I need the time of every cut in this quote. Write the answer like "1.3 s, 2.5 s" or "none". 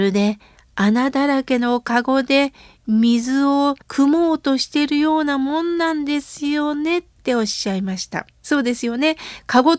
3.8 s, 7.1 s, 8.3 s